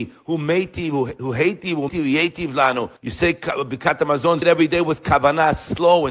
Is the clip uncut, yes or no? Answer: no